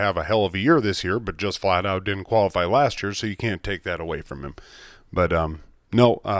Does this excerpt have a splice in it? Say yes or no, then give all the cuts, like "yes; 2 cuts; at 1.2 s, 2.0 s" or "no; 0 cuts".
no; 0 cuts